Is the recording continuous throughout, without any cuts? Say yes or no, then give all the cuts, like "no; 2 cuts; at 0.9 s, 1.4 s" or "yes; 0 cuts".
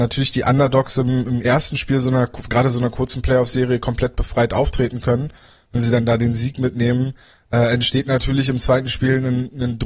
yes; 0 cuts